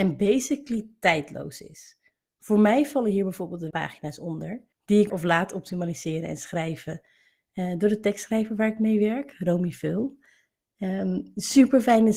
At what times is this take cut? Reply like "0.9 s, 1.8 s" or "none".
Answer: 3.7 s, 4.7 s, 5.1 s